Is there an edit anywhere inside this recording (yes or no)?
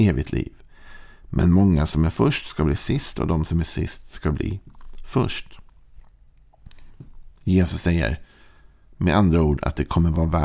no